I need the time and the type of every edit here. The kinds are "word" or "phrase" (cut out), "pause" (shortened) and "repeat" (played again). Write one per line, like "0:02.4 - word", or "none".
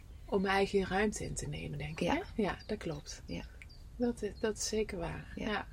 none

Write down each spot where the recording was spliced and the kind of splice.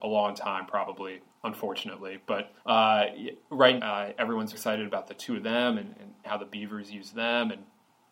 0:01.3 - pause
0:02.6 - pause
0:03.8 - word
0:04.5 - word
0:06.2 - word

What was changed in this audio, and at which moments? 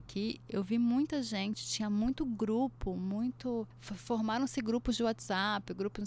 0:03.7 - pause

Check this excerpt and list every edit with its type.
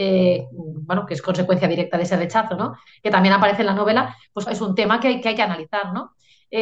0:04.5 - word
0:05.2 - word

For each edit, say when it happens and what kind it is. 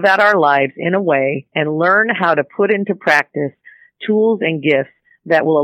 none

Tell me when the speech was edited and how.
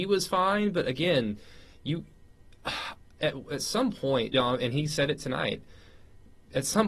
0:04.3 - word

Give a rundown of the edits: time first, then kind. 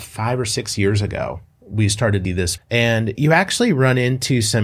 0:02.2 - word
0:02.6 - word
0:03.1 - word

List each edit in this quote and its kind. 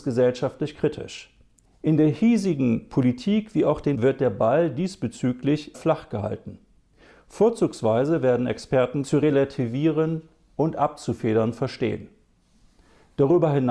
0:01.6 - pause
0:03.9 - word
0:05.7 - word
0:09.0 - phrase

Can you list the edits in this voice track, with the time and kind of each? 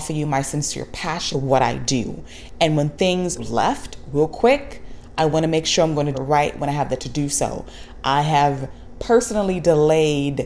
0:01.3 - phrase
0:03.4 - word
0:06.1 - word
0:07.0 - word

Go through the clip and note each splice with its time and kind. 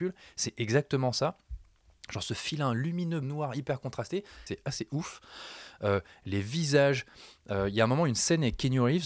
0:03.2 - phrase
0:04.5 - phrase

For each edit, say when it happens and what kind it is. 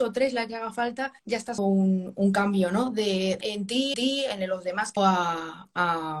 0:01.2 - pause
0:01.6 - word
0:02.1 - word
0:03.4 - word
0:03.9 - repeat
0:05.0 - phrase

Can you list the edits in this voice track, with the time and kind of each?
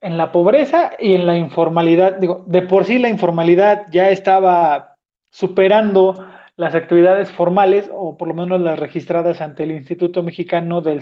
none

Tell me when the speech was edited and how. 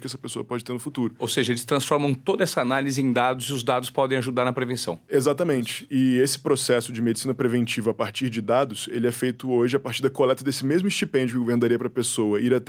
none

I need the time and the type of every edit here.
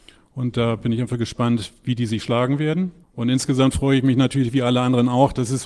0:03.0 - pause

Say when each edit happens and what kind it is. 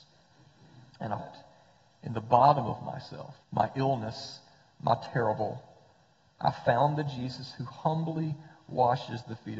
0:01.2 - word
0:03.4 - pause

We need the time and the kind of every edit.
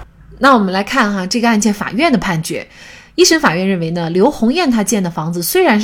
none

